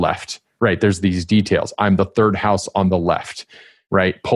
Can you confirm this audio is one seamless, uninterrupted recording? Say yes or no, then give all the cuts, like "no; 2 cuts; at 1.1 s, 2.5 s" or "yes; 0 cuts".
yes; 0 cuts